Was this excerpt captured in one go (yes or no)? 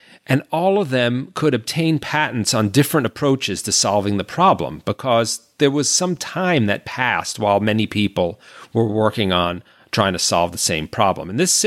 yes